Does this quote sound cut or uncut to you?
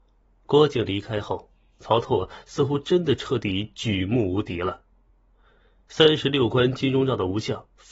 uncut